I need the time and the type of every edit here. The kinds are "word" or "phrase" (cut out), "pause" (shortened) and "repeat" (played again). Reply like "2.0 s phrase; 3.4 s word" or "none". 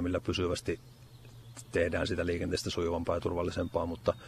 none